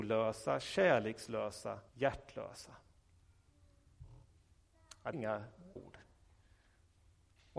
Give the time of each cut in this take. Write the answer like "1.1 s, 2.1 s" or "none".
1.9 s, 5.1 s, 5.8 s